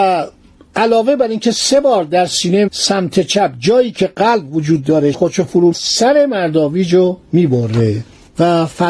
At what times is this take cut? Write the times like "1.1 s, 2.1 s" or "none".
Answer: 2.7 s, 5.1 s, 5.7 s